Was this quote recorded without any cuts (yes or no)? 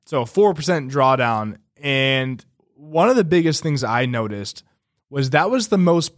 yes